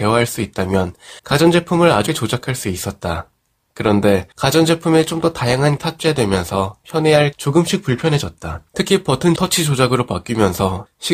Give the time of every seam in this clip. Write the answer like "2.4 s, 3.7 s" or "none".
1.2 s, 2.1 s, 4.3 s, 5.8 s, 7.3 s, 8.7 s, 9.4 s